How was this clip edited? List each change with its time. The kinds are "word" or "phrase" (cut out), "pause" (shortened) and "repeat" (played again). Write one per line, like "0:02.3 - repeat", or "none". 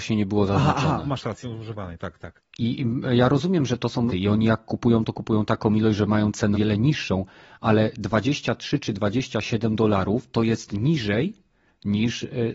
0:01.4 - word
0:04.1 - word
0:06.5 - word